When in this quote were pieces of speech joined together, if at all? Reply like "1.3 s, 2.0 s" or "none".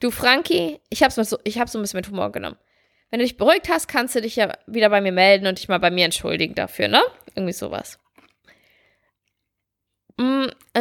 none